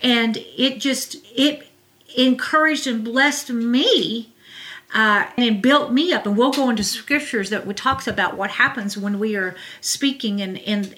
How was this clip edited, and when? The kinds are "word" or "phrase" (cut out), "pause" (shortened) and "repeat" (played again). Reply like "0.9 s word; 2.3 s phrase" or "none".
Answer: 1.2 s pause; 5.4 s word